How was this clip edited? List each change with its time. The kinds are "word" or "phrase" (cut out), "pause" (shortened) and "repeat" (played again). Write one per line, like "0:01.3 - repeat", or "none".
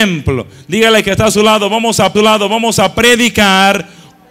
0:02.1 - repeat